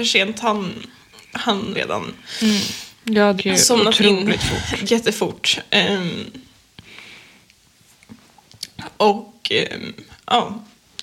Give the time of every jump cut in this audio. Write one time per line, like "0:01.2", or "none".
0:01.7
0:03.4
0:04.8